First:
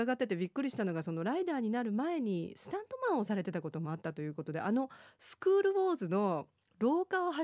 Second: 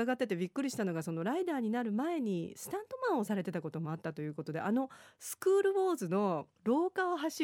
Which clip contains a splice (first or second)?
second